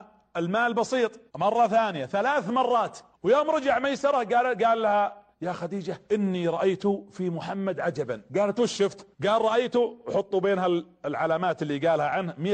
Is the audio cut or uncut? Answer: cut